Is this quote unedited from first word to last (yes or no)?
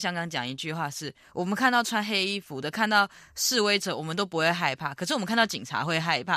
yes